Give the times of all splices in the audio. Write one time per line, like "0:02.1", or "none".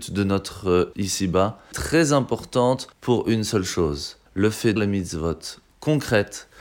0:00.9
0:01.7
0:02.9
0:04.3
0:04.8